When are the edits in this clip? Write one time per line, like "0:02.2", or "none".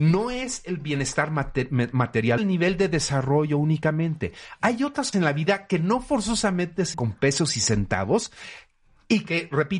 0:02.4
0:05.1
0:06.9